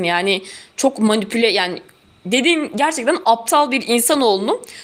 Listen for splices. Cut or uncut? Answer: uncut